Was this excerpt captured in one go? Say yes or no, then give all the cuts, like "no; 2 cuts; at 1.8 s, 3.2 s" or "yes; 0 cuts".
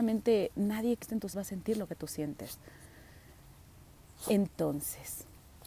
no; 2 cuts; at 1.0 s, 1.3 s